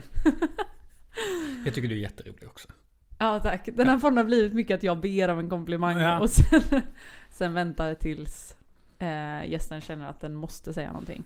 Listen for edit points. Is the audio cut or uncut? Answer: uncut